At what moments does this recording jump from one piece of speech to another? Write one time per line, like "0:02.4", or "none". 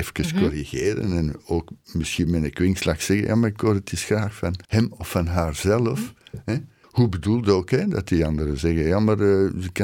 0:04.6
0:06.8